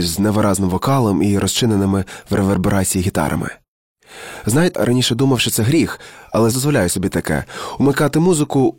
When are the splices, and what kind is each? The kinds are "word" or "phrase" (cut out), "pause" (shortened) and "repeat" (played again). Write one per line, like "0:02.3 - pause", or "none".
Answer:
0:04.7 - word
0:06.5 - word